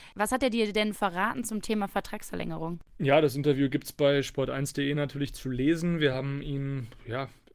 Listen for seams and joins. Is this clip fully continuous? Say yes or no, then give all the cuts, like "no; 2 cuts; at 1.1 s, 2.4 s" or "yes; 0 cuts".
yes; 0 cuts